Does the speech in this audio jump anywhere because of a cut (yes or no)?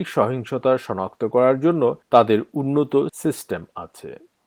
no